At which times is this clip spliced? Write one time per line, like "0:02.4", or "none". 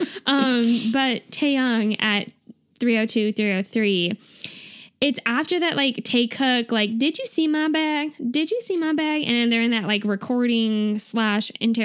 none